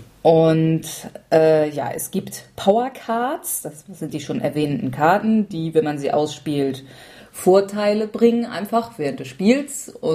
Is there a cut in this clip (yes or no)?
no